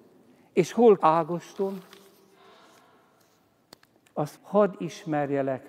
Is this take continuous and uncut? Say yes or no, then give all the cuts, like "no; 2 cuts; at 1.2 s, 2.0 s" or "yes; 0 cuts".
no; 2 cuts; at 1.0 s, 4.4 s